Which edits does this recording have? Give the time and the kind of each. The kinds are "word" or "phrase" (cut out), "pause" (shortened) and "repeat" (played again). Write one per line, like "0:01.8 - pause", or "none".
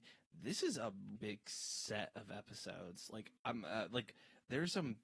0:01.2 - word